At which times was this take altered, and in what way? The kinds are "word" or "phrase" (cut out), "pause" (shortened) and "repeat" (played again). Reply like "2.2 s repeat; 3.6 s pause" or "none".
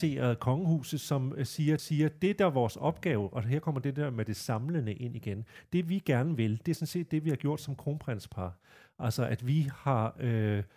1.8 s repeat